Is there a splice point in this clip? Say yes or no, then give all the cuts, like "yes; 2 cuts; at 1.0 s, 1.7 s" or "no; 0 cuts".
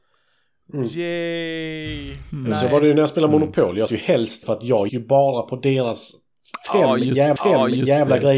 yes; 4 cuts; at 3.9 s, 4.4 s, 4.9 s, 7.4 s